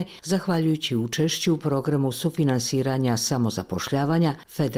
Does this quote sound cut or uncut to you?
uncut